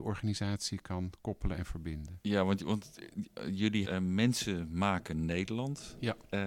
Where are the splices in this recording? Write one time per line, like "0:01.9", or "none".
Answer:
0:03.8